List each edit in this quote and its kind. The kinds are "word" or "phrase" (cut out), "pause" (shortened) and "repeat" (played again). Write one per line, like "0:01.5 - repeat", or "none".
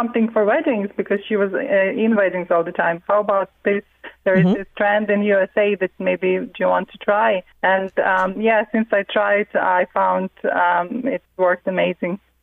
0:03.6 - word
0:07.5 - pause
0:11.3 - pause